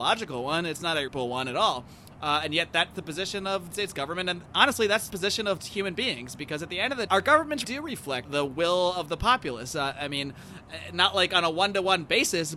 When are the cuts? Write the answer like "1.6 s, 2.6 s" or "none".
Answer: 1.1 s, 2.9 s, 3.7 s, 4.5 s, 5.1 s, 5.6 s, 7.1 s, 7.6 s, 8.3 s